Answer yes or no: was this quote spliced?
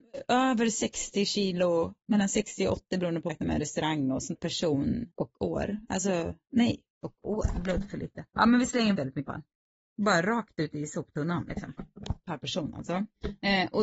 yes